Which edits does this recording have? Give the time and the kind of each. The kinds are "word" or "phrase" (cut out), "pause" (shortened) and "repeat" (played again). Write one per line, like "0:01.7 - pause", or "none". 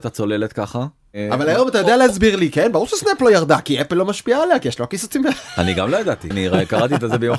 0:06.3 - word